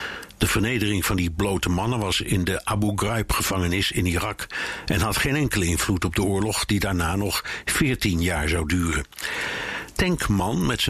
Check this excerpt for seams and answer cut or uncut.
uncut